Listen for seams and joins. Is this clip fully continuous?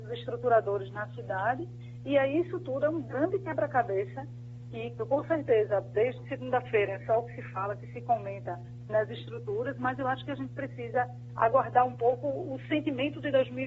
no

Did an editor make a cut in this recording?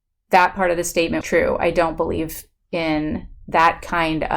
yes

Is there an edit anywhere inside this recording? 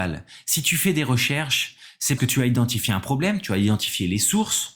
yes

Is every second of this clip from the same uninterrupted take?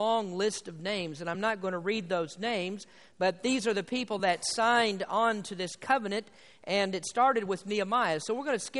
yes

